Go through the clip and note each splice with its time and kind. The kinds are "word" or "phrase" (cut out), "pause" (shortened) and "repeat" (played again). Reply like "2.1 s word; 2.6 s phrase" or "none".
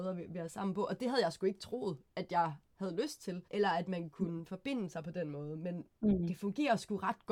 2.6 s pause; 3.4 s pause